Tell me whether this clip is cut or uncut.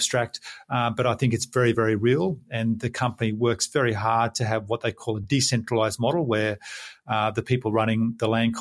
uncut